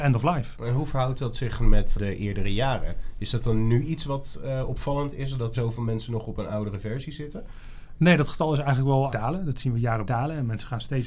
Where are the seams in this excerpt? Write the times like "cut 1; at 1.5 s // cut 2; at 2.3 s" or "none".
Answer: cut 1; at 2.0 s // cut 2; at 5.5 s // cut 3; at 9.1 s // cut 4; at 10.1 s

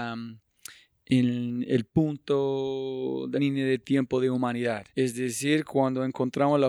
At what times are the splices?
cut 1; at 3.3 s // cut 2; at 4.9 s

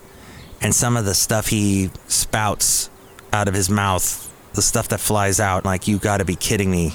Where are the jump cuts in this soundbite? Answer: cut 1; at 5.6 s

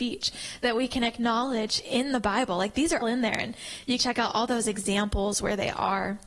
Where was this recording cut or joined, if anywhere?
cut 1; at 3.0 s // cut 2; at 4.0 s

